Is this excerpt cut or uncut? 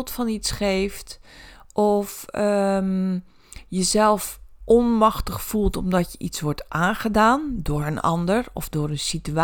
uncut